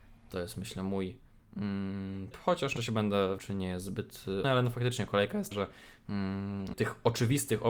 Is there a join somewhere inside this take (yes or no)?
yes